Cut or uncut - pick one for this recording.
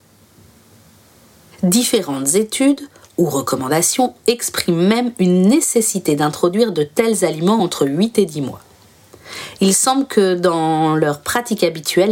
uncut